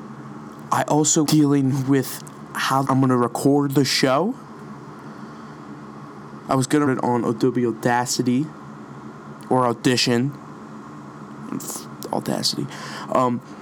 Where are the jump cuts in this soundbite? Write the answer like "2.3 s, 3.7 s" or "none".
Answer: 1.2 s, 2.8 s, 6.9 s